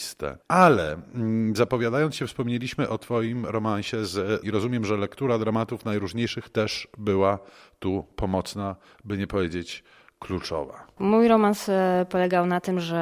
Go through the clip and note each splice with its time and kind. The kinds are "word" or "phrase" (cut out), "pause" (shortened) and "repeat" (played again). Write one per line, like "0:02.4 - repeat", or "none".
0:04.4 - word